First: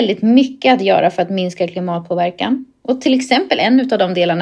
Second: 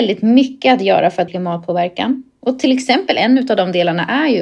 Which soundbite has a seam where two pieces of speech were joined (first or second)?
second